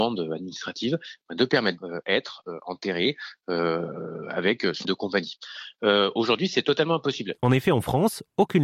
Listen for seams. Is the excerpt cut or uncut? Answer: cut